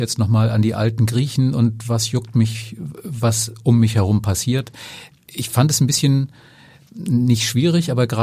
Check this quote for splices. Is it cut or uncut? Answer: uncut